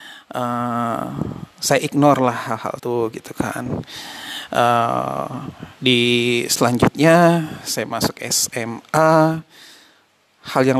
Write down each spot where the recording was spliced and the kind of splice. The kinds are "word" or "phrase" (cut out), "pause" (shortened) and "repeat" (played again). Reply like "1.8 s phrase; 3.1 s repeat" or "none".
2.8 s word; 5.7 s pause